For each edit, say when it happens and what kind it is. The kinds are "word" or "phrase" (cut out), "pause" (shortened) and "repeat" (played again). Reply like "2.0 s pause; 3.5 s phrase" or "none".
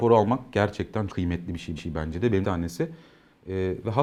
1.1 s word; 1.8 s repeat; 2.4 s phrase

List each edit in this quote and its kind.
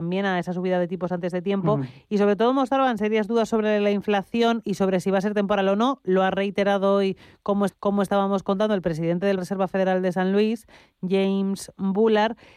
7.7 s repeat; 9.4 s phrase

